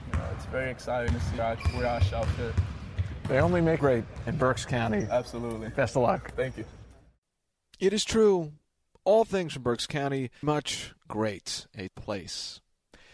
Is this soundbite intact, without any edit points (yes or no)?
no